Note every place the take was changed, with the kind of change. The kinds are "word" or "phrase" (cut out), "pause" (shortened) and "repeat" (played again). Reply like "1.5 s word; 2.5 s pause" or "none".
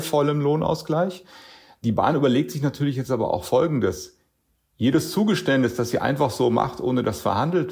none